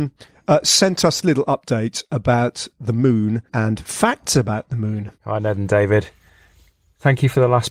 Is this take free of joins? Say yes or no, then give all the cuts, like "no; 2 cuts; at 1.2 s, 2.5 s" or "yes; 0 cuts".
no; 3 cuts; at 1.2 s, 3.5 s, 5.1 s